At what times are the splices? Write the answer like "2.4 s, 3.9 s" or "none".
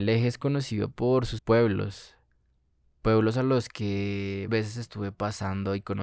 1.4 s, 4.5 s